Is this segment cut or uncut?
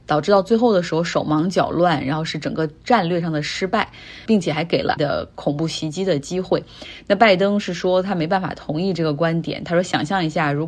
cut